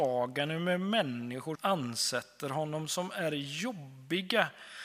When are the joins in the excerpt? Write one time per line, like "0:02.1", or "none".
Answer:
0:01.6